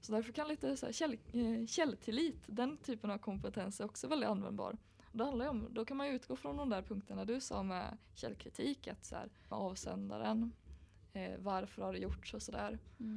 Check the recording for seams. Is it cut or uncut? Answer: cut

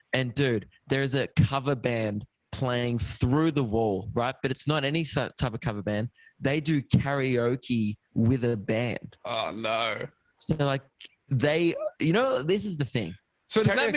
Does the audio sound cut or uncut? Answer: uncut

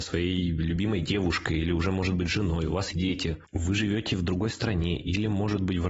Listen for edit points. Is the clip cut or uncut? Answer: cut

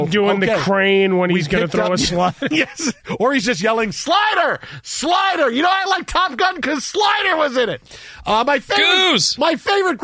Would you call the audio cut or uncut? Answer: uncut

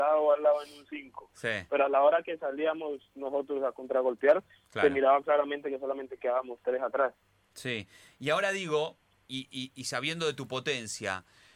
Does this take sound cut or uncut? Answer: uncut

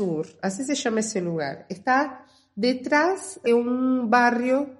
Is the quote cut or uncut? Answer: cut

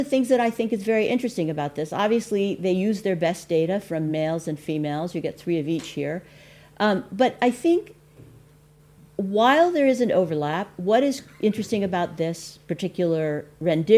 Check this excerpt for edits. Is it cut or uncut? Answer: uncut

